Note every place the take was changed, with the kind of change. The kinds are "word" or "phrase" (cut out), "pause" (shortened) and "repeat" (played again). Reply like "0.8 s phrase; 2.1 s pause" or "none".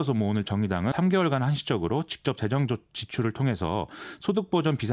0.9 s word

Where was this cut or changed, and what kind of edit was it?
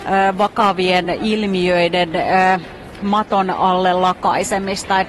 none

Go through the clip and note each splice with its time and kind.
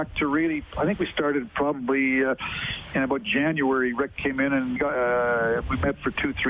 4.8 s word

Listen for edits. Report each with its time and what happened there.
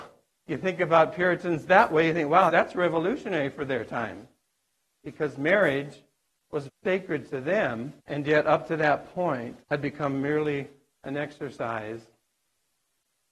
2.5 s word; 6.7 s word; 8.0 s pause; 9.6 s pause

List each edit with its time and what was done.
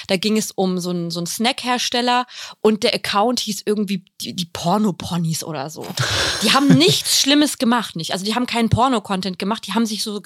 7.9 s word

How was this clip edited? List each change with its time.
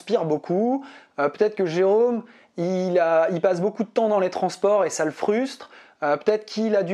none

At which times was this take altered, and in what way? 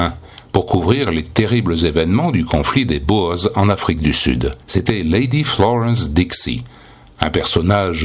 4.6 s pause

